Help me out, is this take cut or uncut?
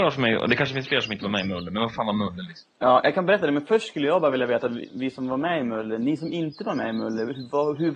uncut